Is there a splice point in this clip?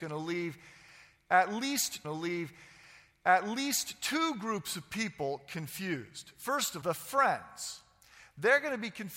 yes; 2 cuts; at 2.0 s, 6.8 s

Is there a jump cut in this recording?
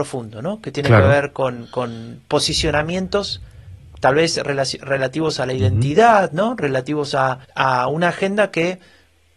yes; 1 cut; at 7.4 s

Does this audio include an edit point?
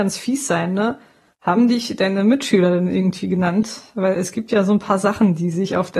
no; 0 cuts

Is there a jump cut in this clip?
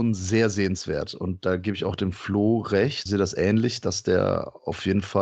yes; 1 cut; at 3.1 s

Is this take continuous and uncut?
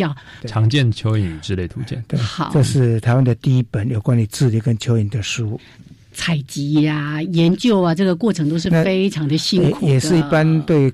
yes; 0 cuts

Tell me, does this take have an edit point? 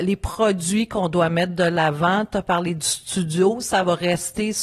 no; 0 cuts

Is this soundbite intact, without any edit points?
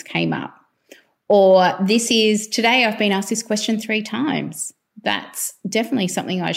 yes; 0 cuts

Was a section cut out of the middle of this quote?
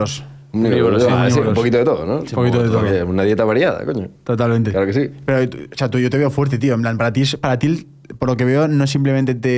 no; 0 cuts

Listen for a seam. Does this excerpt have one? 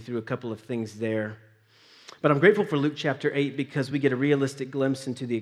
no; 0 cuts

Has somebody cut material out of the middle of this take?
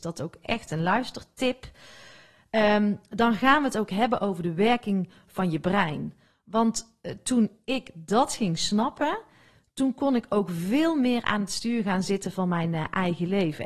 no; 0 cuts

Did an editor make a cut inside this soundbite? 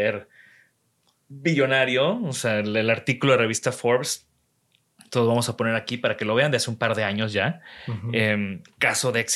no; 0 cuts

